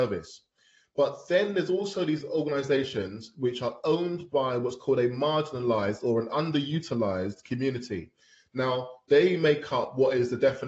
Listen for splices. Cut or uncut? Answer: uncut